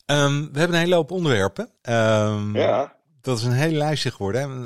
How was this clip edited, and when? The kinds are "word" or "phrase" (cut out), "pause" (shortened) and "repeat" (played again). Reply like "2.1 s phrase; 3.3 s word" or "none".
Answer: 1.8 s pause; 3.0 s pause